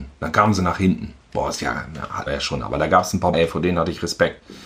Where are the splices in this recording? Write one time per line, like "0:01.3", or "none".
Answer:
0:02.3
0:03.3